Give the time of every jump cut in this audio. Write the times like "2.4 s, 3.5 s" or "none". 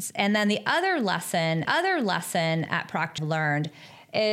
1.6 s, 3.2 s